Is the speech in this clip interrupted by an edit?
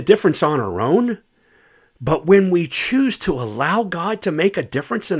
no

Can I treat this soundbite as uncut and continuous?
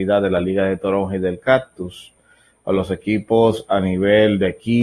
yes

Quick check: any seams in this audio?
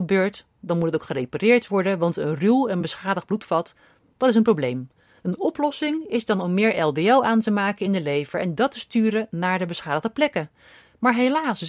no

